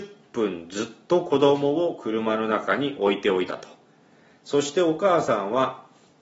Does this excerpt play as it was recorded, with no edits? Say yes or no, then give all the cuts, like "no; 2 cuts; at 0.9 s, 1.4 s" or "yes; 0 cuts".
yes; 0 cuts